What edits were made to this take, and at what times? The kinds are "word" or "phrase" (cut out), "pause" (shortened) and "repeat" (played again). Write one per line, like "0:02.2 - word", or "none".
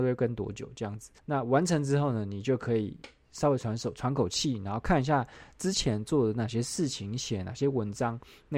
0:01.2 - pause